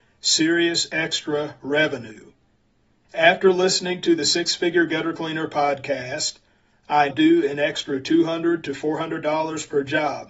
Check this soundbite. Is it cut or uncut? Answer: cut